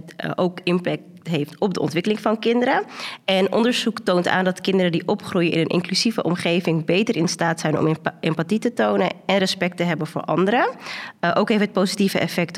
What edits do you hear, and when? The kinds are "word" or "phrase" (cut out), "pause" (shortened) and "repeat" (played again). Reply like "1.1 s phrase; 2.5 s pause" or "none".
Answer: none